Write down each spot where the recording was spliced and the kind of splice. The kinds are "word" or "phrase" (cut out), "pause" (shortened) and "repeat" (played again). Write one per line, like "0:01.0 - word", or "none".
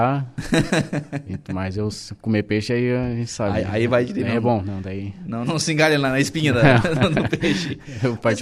0:05.4 - word